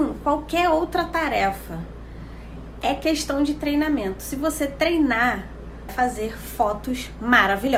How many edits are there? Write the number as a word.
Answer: one